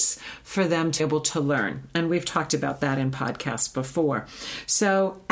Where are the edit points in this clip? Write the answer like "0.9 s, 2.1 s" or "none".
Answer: 1.0 s